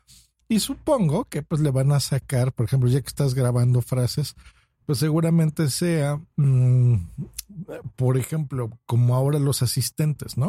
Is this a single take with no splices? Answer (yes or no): yes